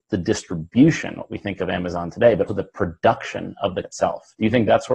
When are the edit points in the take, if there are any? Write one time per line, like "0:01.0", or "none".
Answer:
0:02.5
0:03.8

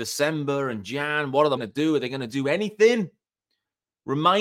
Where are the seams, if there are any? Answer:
0:01.6

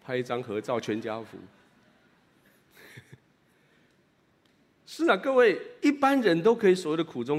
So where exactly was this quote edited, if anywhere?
0:03.2

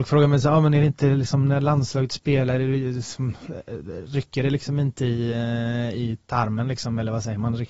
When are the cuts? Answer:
none

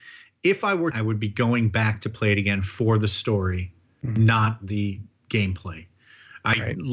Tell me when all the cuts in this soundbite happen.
0:00.9

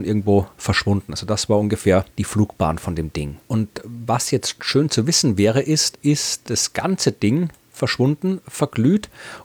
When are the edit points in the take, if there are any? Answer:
0:02.1
0:03.4
0:05.9
0:06.4

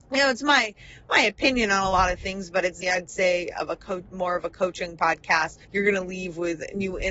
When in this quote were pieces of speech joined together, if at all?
0:02.8
0:05.6

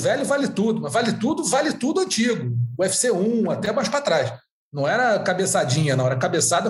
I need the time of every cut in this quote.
none

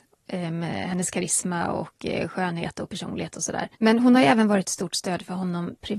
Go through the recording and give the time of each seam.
0:03.7

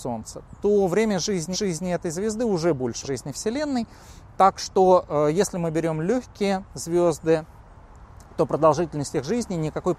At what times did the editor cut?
0:01.5
0:03.0

